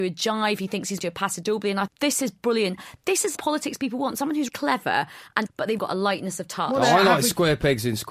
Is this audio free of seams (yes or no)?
no